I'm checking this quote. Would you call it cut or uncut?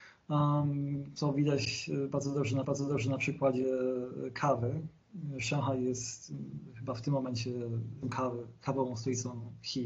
cut